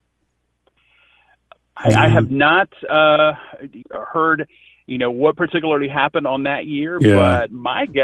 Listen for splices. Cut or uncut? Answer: cut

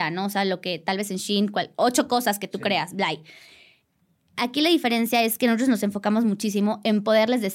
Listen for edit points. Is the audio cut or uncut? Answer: uncut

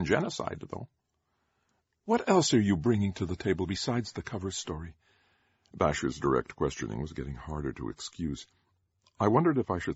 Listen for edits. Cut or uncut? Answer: uncut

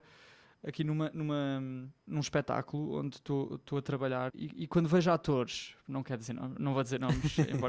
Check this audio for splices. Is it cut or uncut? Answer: cut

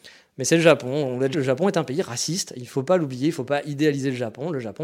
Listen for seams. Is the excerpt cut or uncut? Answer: cut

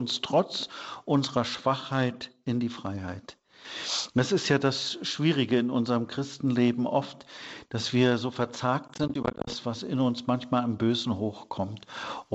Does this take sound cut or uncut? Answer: uncut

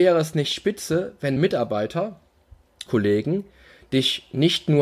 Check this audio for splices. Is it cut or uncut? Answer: cut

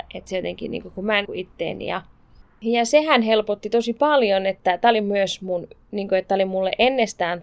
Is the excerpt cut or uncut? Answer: cut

